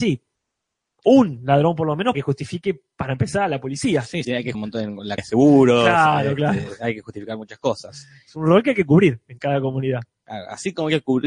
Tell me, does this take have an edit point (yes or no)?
yes